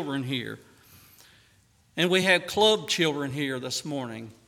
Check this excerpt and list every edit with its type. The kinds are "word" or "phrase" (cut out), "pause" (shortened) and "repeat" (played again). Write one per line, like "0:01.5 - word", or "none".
none